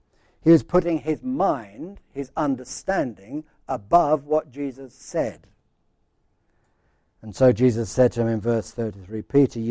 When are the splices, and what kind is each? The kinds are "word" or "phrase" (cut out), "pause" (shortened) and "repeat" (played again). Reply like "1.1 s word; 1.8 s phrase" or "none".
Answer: none